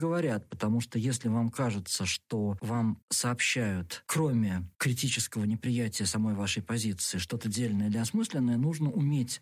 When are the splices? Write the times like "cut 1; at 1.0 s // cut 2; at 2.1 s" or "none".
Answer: cut 1; at 3.0 s // cut 2; at 4.7 s